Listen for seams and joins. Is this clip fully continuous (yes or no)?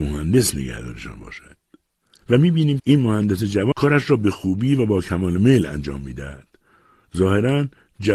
no